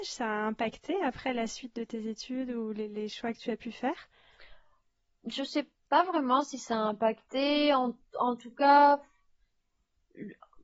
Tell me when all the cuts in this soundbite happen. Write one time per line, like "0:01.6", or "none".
none